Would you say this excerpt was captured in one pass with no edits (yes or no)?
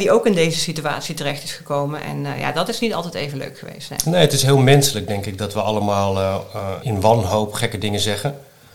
no